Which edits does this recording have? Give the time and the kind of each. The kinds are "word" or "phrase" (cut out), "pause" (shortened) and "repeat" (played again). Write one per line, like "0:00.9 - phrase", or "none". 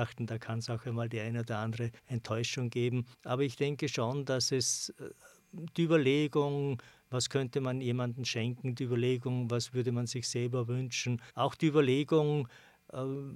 0:02.0 - pause
0:03.1 - pause
0:11.3 - pause